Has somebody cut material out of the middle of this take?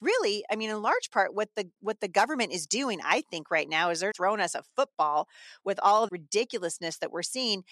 yes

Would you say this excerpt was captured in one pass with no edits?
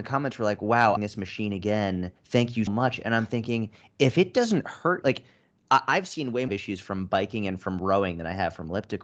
no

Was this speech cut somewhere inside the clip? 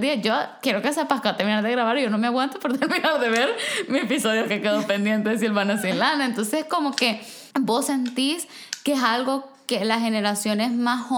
yes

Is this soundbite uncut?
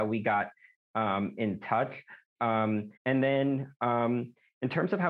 no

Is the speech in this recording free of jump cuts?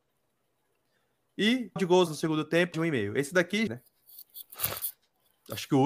no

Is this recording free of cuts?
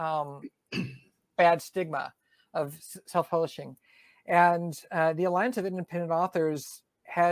yes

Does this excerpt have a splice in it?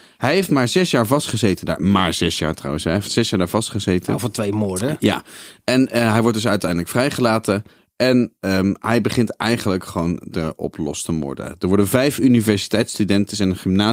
no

